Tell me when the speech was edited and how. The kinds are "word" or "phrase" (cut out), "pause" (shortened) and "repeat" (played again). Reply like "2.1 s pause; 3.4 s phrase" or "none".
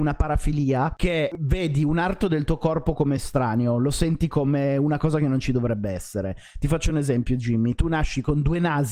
none